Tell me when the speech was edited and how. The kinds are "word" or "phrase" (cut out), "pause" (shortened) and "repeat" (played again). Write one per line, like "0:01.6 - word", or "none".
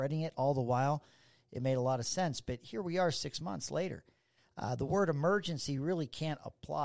none